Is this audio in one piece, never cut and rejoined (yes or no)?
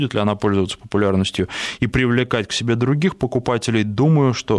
yes